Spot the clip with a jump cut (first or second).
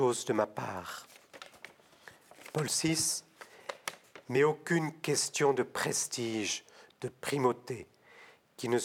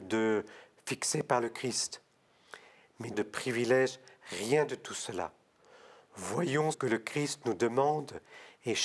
second